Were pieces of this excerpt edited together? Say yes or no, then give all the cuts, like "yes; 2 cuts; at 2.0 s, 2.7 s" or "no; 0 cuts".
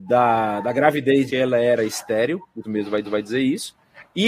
yes; 3 cuts; at 1.3 s, 2.6 s, 3.0 s